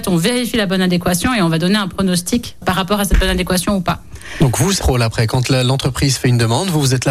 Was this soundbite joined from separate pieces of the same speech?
yes; 2 cuts; at 2.6 s, 4.8 s

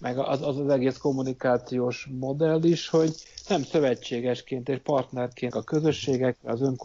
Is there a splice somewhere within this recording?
yes; 1 cut; at 5.5 s

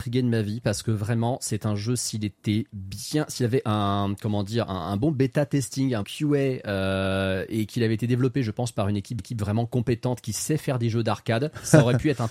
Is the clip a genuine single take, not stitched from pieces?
no; 2 cuts; at 6.0 s, 9.2 s

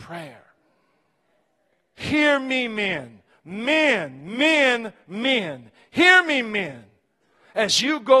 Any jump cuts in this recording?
no; 0 cuts

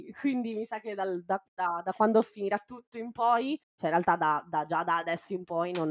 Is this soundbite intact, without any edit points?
no; 1 cut; at 3.6 s

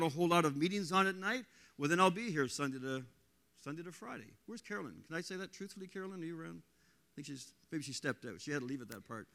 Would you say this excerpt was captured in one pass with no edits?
yes; 0 cuts

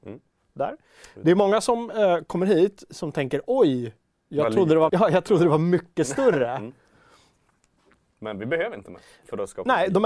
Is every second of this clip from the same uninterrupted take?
no; 1 cut; at 4.9 s

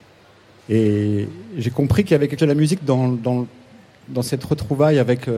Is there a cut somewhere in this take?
yes; 1 cut; at 2.4 s

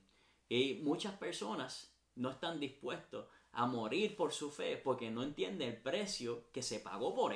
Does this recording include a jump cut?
no; 0 cuts

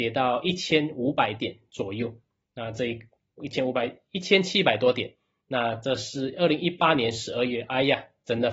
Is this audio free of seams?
yes; 0 cuts

